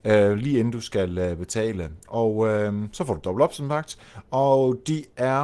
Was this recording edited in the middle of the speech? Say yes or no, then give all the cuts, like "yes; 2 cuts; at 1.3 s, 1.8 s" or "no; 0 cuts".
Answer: no; 0 cuts